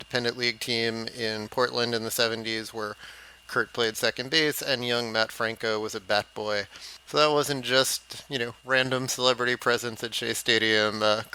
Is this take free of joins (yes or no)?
no